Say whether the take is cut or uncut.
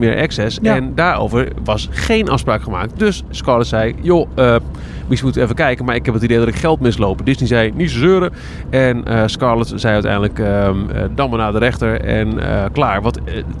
uncut